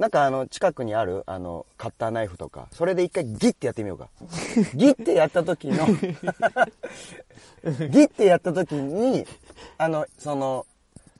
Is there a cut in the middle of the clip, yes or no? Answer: yes